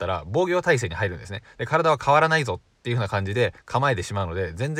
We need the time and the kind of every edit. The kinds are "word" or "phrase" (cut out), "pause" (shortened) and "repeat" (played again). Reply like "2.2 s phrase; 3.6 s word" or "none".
none